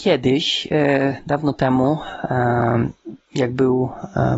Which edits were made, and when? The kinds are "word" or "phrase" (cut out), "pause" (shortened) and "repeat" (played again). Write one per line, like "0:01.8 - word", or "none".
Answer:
none